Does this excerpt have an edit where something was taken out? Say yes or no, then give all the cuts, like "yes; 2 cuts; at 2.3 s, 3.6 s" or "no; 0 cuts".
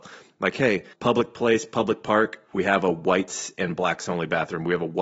yes; 1 cut; at 0.9 s